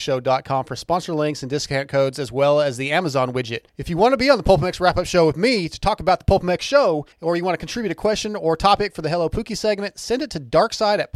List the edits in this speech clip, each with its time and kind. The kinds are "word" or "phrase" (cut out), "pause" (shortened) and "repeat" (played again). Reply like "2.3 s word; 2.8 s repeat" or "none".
3.7 s pause; 7.1 s pause